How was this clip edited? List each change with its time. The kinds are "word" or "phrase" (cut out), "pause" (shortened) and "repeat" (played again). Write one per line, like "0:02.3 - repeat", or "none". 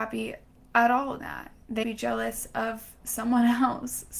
0:01.2 - word
0:01.8 - word